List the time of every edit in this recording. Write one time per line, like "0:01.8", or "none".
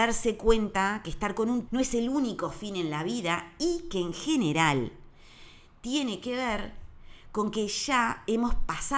0:01.7